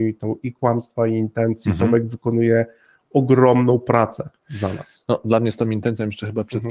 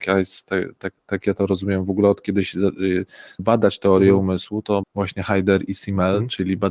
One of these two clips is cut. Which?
second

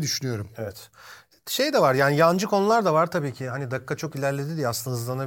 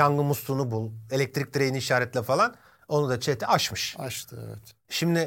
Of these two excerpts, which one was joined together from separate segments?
second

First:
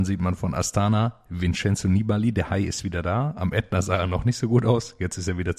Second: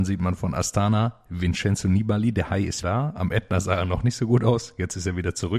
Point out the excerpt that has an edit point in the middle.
second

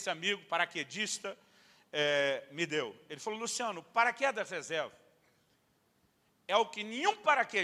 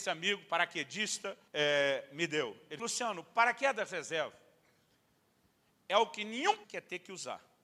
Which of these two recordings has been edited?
second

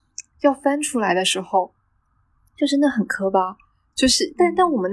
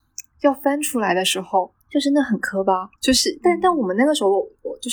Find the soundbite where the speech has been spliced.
second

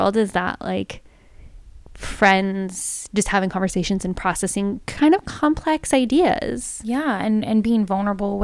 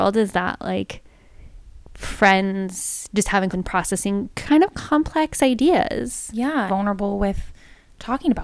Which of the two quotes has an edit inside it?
second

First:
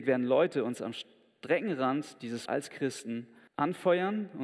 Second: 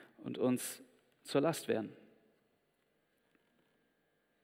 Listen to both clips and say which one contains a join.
first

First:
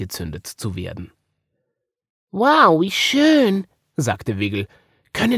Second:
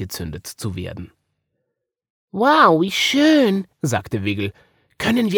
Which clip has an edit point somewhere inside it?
second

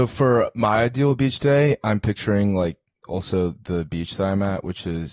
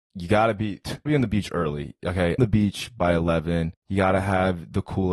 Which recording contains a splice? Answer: second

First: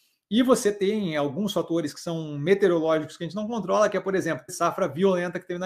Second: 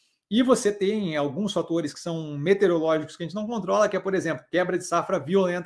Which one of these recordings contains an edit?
first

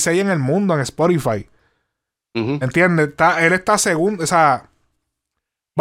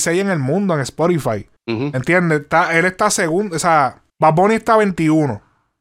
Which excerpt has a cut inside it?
second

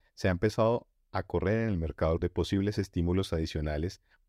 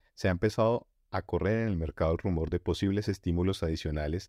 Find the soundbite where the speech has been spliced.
first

